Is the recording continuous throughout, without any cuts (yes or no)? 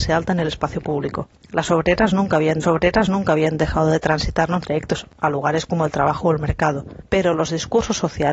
no